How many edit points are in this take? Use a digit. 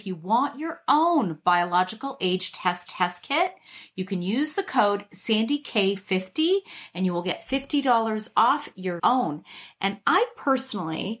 2